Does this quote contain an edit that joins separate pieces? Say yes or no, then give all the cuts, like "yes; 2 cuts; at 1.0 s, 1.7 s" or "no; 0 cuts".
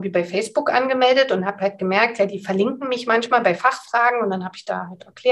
no; 0 cuts